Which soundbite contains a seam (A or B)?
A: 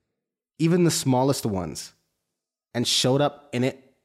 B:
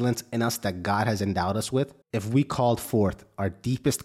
B